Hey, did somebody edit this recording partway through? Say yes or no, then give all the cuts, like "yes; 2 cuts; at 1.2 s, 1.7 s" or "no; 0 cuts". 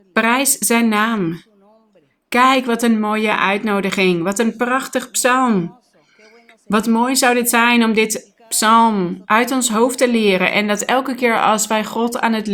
no; 0 cuts